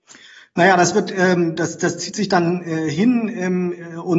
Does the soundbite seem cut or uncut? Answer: uncut